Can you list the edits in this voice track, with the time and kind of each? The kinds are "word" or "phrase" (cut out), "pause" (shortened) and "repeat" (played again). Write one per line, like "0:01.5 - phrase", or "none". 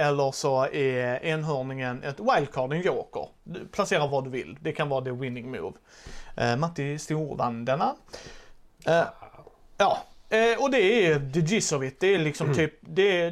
none

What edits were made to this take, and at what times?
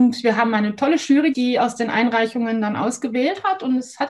0:01.3 - word

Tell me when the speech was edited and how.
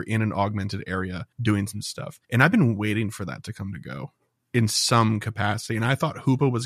0:01.3 - pause
0:02.2 - pause

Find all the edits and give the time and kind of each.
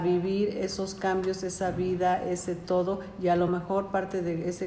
none

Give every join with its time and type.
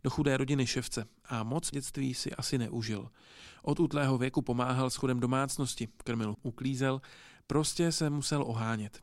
0:01.7 - word
0:06.3 - word

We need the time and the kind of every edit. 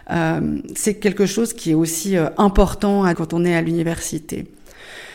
0:03.1 - word

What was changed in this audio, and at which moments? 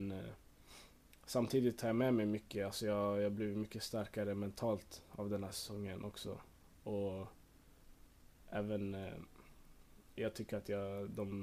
none

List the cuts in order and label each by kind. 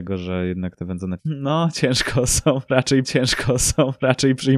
0:01.2 - word
0:03.0 - repeat

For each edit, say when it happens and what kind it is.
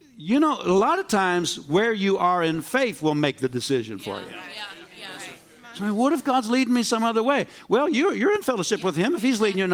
none

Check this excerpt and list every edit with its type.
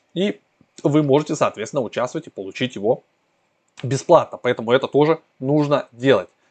none

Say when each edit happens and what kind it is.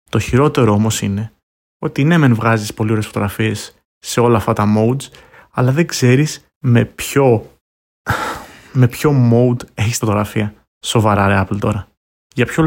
0:06.5 - pause
0:07.7 - pause
0:10.0 - word
0:10.7 - pause

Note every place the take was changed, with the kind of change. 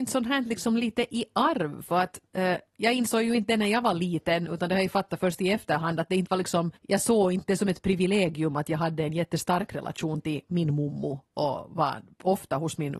0:06.8 - pause

